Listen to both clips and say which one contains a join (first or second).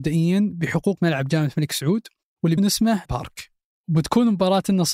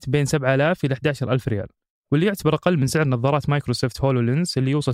first